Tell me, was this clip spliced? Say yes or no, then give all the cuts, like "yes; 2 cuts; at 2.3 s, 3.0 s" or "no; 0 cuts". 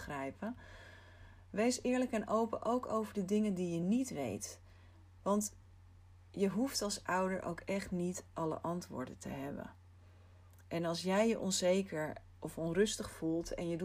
no; 0 cuts